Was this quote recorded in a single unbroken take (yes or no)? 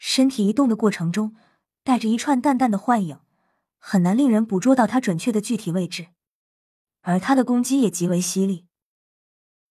yes